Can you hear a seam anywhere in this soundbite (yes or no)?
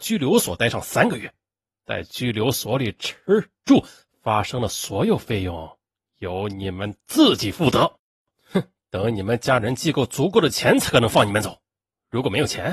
no